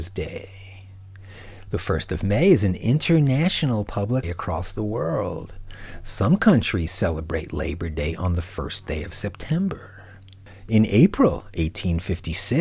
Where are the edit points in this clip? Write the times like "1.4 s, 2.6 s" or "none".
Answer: 4.2 s

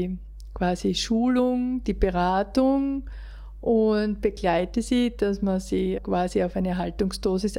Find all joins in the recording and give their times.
6.0 s

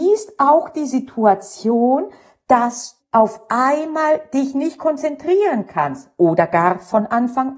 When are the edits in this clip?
3.0 s

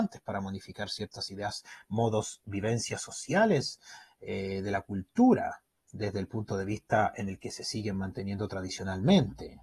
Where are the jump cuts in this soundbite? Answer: none

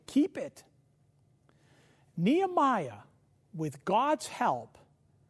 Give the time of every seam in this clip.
none

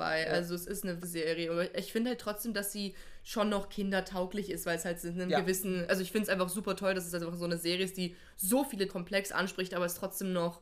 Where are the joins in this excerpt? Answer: 1.0 s, 8.9 s

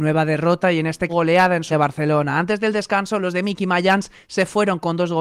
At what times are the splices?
1.1 s, 1.7 s

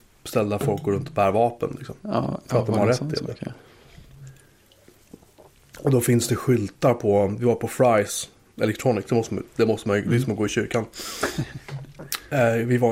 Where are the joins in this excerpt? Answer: none

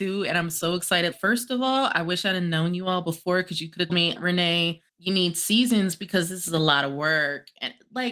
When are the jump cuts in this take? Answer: 3.9 s, 4.9 s

